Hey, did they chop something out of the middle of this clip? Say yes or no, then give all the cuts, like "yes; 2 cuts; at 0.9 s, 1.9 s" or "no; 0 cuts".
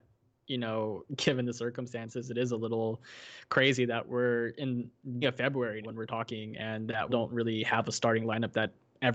yes; 3 cuts; at 5.2 s, 5.8 s, 7.1 s